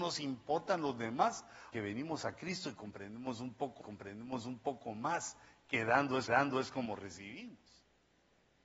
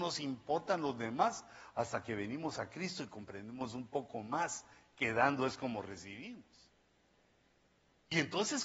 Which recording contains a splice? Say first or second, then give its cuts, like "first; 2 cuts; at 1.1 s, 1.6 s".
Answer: first; 3 cuts; at 1.7 s, 3.8 s, 6.3 s